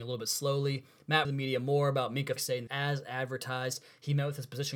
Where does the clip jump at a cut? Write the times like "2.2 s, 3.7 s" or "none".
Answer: 1.2 s, 2.4 s, 2.7 s